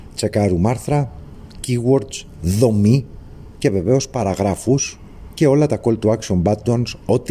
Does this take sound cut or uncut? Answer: uncut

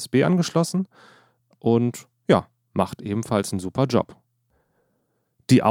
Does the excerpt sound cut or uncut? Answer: uncut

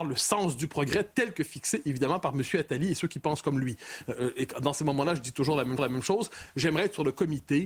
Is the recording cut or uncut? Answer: cut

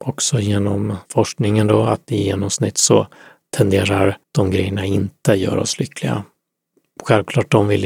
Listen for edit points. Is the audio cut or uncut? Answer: cut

